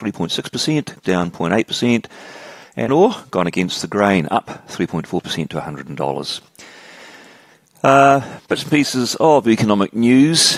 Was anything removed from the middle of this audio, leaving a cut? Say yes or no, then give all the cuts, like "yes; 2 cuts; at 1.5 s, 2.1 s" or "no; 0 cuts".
yes; 2 cuts; at 1.0 s, 2.9 s